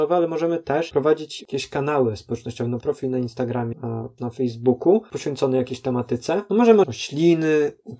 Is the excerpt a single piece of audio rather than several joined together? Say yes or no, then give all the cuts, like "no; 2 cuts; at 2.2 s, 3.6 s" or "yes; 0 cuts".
no; 5 cuts; at 1.4 s, 2.8 s, 3.7 s, 4.2 s, 6.8 s